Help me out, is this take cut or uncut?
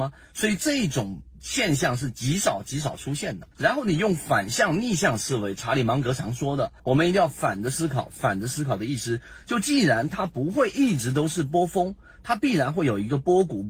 cut